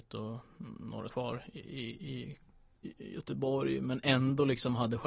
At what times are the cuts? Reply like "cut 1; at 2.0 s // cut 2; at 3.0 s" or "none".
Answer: cut 1; at 1.1 s